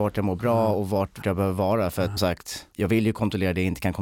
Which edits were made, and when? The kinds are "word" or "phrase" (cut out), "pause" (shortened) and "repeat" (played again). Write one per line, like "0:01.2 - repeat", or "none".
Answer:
0:01.2 - word
0:02.2 - word
0:02.7 - pause